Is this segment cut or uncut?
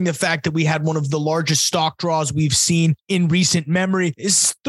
uncut